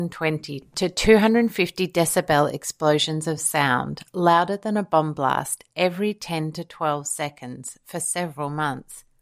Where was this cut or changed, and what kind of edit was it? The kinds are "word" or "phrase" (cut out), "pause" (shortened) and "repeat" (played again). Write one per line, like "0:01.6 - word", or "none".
none